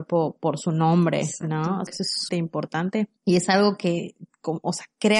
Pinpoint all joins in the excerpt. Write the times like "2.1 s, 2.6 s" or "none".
1.9 s, 2.3 s, 3.2 s